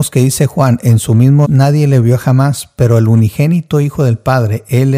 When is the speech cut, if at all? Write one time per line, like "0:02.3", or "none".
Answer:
0:01.4